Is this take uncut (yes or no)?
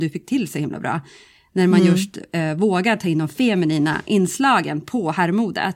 yes